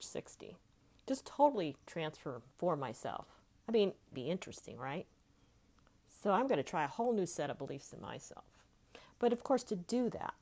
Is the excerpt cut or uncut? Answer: cut